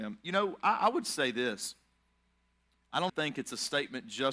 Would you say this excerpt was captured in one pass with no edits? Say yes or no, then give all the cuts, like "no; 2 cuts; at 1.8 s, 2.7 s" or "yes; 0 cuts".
no; 1 cut; at 3.1 s